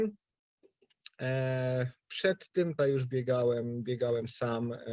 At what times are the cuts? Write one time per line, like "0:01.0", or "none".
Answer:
0:02.8